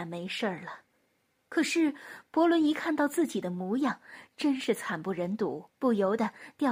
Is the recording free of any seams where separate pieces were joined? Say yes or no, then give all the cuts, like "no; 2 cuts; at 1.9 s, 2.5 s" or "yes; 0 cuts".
no; 1 cut; at 5.7 s